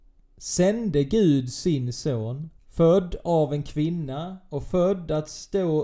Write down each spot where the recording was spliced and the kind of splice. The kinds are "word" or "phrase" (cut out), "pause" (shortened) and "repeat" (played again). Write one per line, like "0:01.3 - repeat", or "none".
0:02.6 - pause